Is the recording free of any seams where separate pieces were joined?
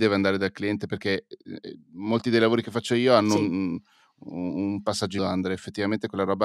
no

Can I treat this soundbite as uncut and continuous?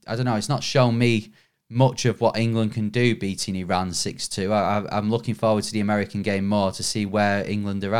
yes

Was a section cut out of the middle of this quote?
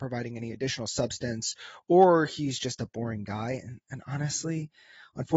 no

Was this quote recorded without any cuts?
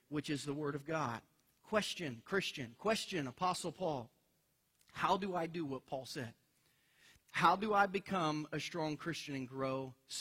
yes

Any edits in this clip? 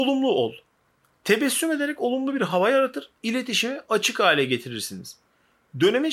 no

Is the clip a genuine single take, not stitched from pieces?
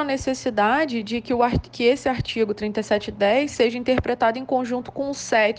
yes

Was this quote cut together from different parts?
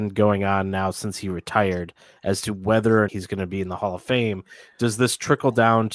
yes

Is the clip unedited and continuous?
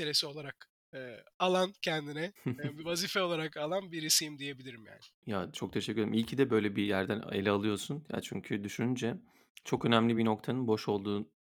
yes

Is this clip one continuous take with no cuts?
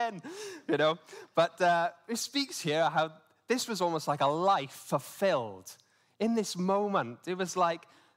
yes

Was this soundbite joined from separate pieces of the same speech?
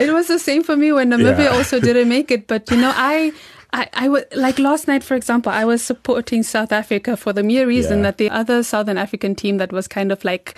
yes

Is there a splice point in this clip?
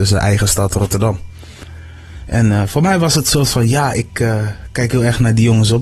no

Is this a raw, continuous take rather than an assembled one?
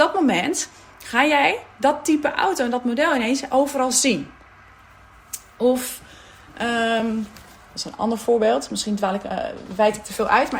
yes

